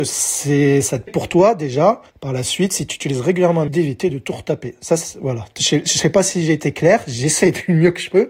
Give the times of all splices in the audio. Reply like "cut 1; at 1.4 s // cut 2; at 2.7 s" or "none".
cut 1; at 1.1 s // cut 2; at 2.1 s // cut 3; at 3.7 s